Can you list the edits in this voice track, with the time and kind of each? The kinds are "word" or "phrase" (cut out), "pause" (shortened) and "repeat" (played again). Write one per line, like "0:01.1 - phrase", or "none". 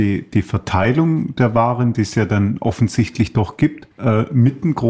0:03.9 - pause